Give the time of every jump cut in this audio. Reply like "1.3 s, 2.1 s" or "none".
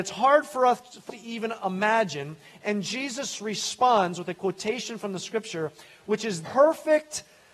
1.1 s, 6.4 s